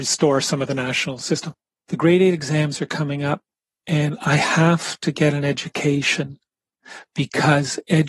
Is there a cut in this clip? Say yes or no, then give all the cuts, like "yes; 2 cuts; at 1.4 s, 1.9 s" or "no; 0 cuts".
no; 0 cuts